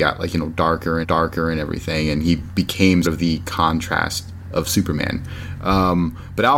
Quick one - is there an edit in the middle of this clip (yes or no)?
yes